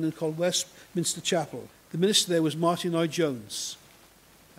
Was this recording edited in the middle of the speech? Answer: yes; 1 cut; at 1.7 s

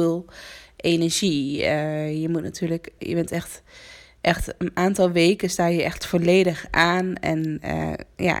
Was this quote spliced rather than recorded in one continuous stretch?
yes; 1 cut; at 3.0 s

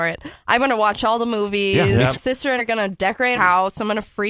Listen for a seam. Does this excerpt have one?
yes; 3 cuts; at 2.1 s, 2.6 s, 3.3 s

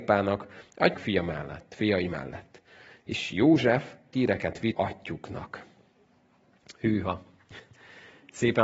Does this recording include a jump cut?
yes; 3 cuts; at 0.9 s, 4.1 s, 4.7 s

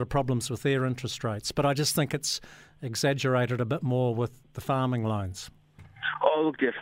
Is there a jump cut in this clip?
no; 0 cuts

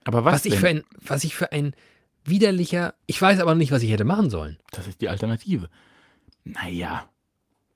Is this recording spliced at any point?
yes; 2 cuts; at 3.0 s, 4.6 s

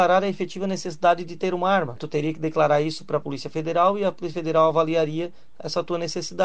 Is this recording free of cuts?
yes; 0 cuts

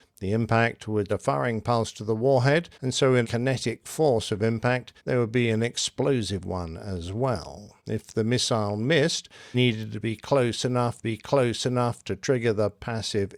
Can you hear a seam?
yes; 7 cuts; at 1.1 s, 2.7 s, 3.2 s, 5.0 s, 7.8 s, 9.5 s, 11.0 s

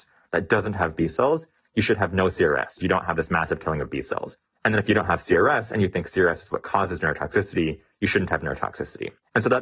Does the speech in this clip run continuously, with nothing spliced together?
no; 1 cut; at 2.8 s

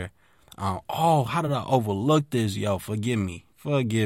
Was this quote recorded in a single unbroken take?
yes; 0 cuts

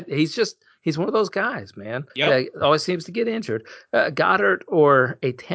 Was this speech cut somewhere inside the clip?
yes; 1 cut; at 2.1 s

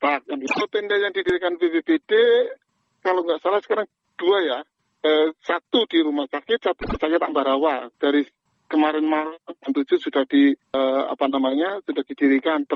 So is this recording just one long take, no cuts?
no; 2 cuts; at 7.9 s, 10.6 s

